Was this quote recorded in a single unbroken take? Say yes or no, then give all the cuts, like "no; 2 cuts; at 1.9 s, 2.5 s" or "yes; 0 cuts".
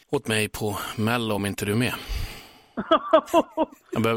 yes; 0 cuts